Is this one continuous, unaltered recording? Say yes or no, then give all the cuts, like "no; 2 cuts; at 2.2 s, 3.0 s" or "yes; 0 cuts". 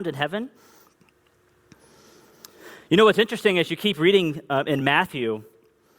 yes; 0 cuts